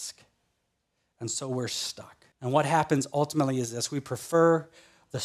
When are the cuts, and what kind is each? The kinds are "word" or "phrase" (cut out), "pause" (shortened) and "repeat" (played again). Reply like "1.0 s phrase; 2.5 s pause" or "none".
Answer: 2.3 s pause

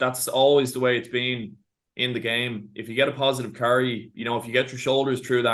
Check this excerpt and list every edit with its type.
none

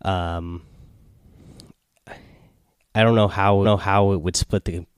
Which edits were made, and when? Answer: 3.6 s repeat

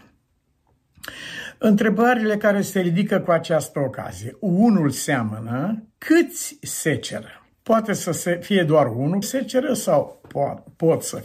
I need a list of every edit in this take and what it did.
5.9 s pause; 7.5 s pause; 9.2 s word

